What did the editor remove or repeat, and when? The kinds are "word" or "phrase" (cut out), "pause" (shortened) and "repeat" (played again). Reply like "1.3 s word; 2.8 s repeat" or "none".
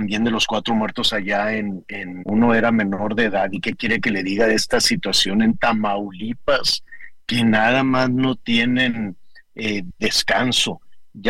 2.2 s phrase